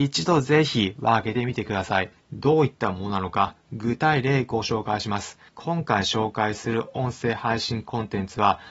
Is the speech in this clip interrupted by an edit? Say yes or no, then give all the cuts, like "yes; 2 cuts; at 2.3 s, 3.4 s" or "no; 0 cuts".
yes; 2 cuts; at 2.2 s, 5.5 s